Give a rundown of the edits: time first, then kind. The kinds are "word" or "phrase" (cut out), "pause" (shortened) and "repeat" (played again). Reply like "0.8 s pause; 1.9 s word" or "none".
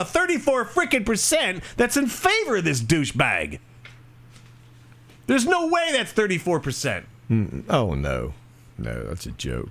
none